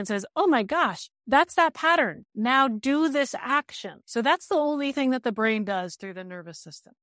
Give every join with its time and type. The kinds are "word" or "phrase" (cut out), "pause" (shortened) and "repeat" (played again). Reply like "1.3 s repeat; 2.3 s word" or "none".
1.2 s pause; 2.3 s pause; 4.0 s pause